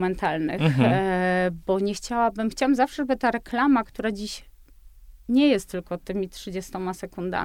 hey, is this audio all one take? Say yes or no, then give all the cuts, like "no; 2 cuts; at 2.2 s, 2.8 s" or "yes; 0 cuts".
yes; 0 cuts